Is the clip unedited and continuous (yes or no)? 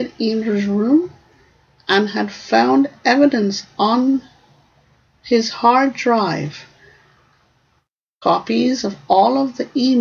yes